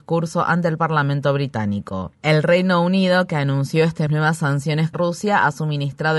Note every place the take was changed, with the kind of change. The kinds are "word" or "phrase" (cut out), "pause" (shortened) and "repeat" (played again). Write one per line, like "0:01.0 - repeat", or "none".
0:04.1 - word
0:04.9 - word